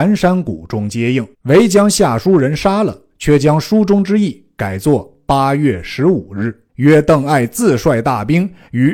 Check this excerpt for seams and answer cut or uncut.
cut